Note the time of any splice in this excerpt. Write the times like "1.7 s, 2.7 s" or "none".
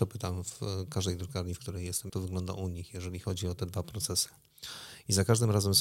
2.1 s